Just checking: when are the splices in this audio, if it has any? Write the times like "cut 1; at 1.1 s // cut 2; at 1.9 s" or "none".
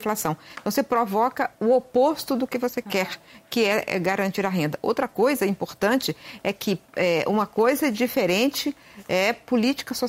cut 1; at 6.9 s